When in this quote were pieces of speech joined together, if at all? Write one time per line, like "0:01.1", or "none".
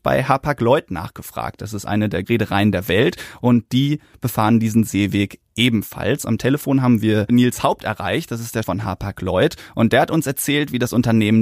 0:02.2
0:08.6